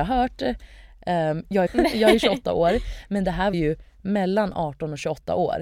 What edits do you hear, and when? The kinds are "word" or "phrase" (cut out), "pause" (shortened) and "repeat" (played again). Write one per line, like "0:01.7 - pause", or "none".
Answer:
0:01.7 - phrase
0:03.5 - word